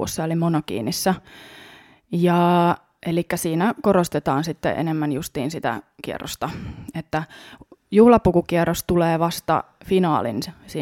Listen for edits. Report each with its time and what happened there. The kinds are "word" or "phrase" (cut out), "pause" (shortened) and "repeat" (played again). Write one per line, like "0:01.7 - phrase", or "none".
none